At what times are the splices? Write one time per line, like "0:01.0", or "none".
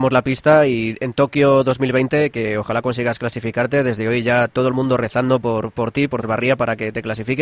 0:06.2